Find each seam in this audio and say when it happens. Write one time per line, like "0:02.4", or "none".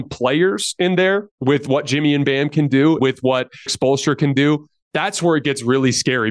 0:03.0
0:03.7